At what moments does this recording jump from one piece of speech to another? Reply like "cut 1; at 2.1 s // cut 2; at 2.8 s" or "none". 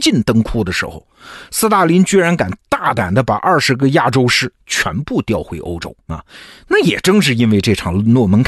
cut 1; at 6.0 s